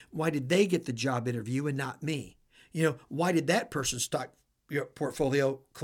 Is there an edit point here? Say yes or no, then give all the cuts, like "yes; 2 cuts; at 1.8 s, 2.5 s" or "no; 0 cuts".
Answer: no; 0 cuts